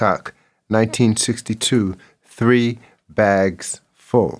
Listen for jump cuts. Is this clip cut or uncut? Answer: uncut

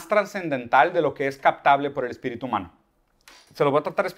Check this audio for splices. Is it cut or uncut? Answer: uncut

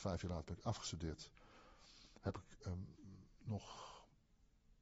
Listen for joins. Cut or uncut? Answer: uncut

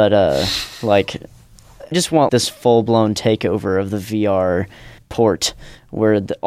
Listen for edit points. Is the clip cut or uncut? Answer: cut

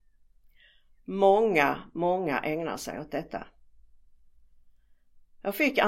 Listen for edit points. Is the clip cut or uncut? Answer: uncut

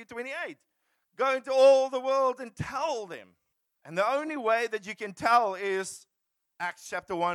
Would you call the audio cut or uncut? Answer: cut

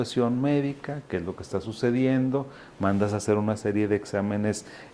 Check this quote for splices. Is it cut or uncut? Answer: uncut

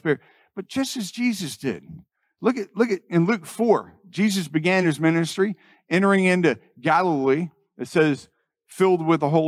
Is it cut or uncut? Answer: uncut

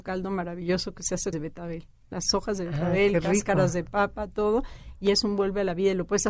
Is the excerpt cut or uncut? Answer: cut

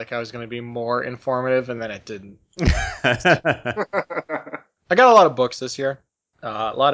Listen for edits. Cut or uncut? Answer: uncut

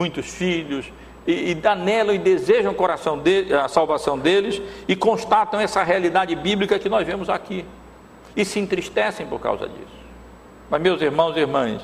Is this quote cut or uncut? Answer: uncut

